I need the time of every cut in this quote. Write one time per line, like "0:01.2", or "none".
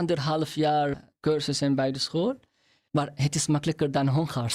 none